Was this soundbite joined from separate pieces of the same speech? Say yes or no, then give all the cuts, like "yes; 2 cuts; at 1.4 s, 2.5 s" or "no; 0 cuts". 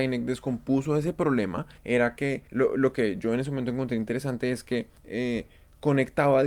yes; 3 cuts; at 1.8 s, 2.5 s, 5.0 s